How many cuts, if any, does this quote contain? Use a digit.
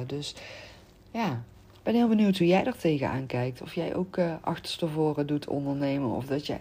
0